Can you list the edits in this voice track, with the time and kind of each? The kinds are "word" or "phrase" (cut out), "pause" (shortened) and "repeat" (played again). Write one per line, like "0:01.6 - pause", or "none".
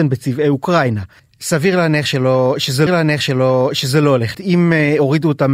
0:01.2 - pause
0:02.9 - repeat
0:04.3 - word